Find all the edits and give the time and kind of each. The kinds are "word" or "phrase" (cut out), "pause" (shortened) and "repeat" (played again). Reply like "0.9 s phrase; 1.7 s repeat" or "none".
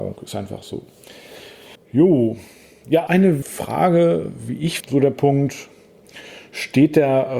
1.8 s pause; 3.1 s word; 3.4 s word; 4.8 s phrase